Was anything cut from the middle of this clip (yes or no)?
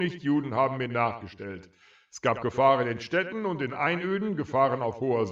no